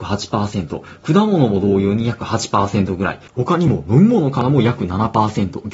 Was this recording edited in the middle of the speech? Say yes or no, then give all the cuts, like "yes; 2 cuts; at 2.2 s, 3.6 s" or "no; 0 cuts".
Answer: yes; 1 cut; at 3.3 s